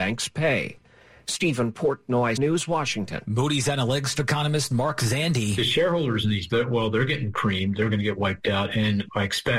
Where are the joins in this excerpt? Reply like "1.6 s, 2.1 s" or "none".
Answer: 2.4 s, 4.1 s, 6.5 s